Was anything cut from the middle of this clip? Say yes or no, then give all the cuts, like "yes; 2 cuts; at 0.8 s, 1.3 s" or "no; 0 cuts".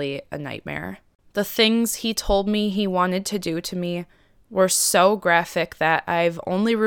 no; 0 cuts